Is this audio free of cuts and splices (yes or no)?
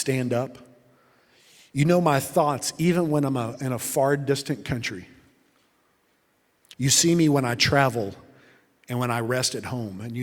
yes